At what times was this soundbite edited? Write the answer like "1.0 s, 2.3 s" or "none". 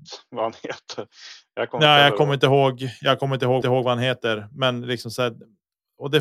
3.6 s